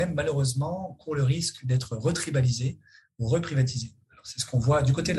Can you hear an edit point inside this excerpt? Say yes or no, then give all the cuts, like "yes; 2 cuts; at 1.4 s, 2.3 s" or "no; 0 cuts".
no; 0 cuts